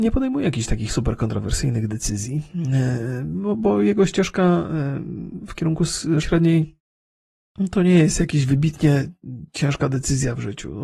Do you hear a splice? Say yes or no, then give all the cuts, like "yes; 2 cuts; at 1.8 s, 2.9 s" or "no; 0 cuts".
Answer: yes; 1 cut; at 6.2 s